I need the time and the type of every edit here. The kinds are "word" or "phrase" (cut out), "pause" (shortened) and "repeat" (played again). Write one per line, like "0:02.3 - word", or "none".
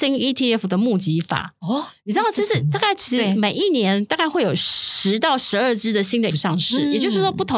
0:06.3 - word